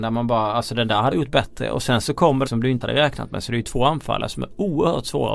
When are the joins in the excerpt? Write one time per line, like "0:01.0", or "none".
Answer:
0:01.1
0:02.5
0:02.8